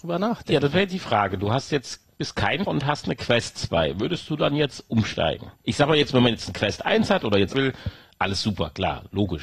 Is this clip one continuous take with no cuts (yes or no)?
no